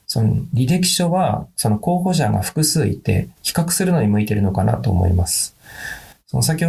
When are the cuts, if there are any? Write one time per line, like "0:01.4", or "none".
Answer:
0:03.4